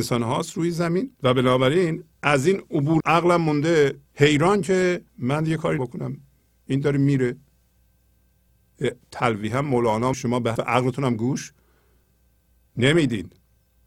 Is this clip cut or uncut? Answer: cut